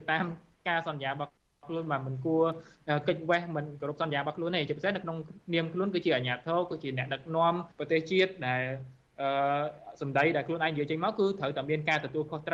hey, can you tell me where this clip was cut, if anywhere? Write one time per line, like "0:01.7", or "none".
0:07.7